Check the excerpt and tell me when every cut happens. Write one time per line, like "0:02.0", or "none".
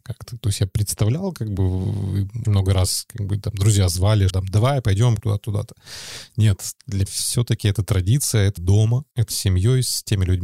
0:02.4
0:04.3
0:05.2
0:07.1
0:08.6
0:09.3